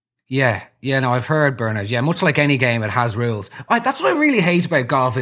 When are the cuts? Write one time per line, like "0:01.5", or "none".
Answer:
none